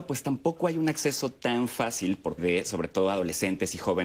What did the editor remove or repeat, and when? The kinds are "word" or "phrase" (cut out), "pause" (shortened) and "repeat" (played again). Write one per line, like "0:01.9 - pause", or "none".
0:02.4 - word